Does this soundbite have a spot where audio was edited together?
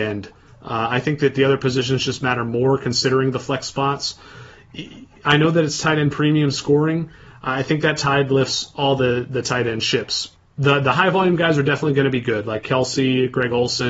no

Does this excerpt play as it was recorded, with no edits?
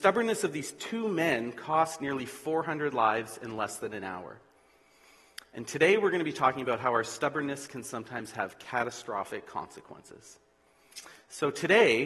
yes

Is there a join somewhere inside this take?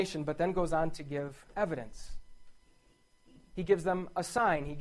no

